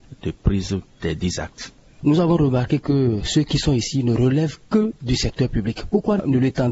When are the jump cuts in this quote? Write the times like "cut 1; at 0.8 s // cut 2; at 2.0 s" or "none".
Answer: none